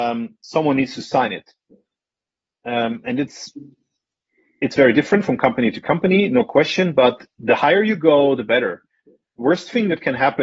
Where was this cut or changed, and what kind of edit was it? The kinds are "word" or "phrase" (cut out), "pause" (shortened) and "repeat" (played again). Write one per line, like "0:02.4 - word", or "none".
none